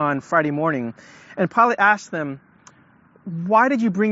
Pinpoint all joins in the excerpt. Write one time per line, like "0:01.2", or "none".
none